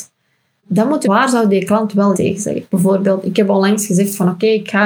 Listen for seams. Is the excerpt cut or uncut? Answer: cut